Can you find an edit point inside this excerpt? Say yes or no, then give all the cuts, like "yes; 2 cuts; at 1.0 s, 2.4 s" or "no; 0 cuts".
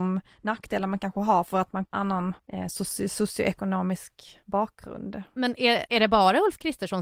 yes; 1 cut; at 1.9 s